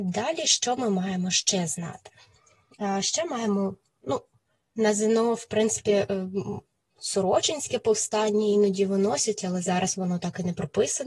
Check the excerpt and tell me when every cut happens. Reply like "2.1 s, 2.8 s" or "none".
none